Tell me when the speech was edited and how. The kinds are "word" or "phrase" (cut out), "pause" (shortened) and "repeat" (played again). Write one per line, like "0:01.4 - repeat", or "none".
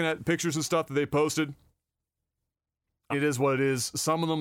0:03.1 - word